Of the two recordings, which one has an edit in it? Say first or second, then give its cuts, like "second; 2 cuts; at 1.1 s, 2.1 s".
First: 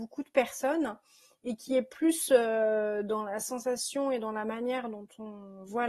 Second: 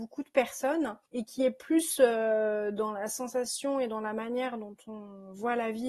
second; 1 cut; at 1.1 s